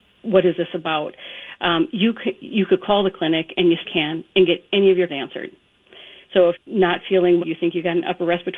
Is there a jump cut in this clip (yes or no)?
yes